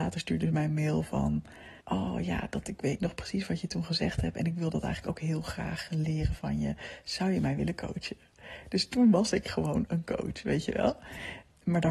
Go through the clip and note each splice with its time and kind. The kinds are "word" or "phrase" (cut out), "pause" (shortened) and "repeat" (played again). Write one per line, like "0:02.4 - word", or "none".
0:01.8 - pause